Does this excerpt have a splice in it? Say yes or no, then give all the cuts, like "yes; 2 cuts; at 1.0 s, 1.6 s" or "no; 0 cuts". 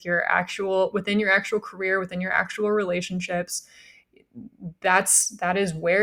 no; 0 cuts